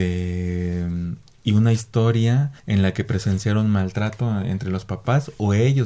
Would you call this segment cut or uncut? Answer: cut